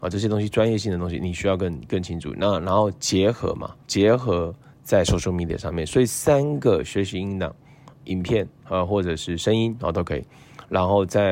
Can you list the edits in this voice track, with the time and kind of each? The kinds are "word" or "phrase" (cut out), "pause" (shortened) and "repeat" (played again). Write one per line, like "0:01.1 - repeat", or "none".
0:03.8 - pause
0:07.9 - word
0:08.5 - pause